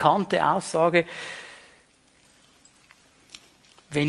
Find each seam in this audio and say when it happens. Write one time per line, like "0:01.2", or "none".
none